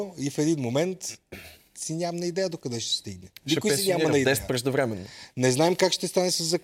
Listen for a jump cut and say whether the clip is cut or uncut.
uncut